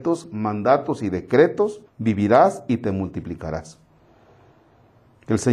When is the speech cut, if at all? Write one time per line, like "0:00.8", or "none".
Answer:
0:01.9